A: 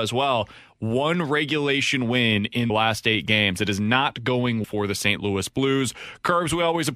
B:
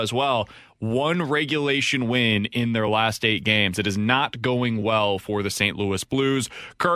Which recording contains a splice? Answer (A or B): A